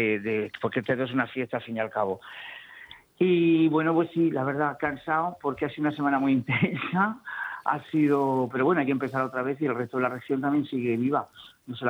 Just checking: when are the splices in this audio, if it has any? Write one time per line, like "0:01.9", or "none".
none

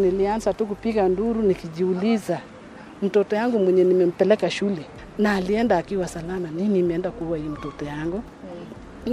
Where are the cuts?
none

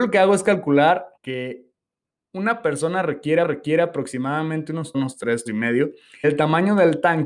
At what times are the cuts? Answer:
0:01.2
0:03.4
0:04.9
0:05.5
0:06.2

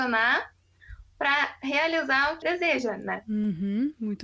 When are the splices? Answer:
0:02.4

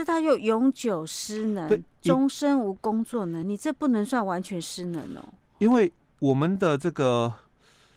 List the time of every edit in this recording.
none

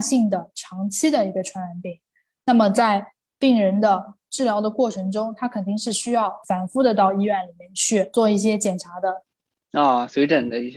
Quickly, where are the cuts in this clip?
none

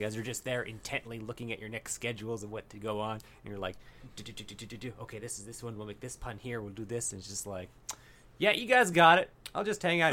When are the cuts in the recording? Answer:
none

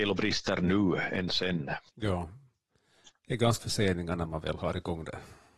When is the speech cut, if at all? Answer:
0:01.9
0:03.6

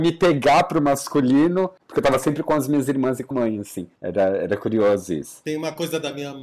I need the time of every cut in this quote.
0:03.3
0:04.0

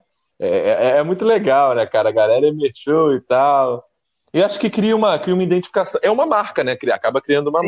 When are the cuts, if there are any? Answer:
none

